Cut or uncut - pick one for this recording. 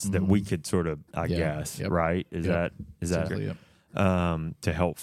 cut